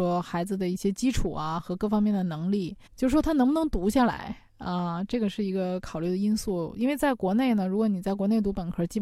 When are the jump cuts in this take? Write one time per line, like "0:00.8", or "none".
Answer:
0:02.9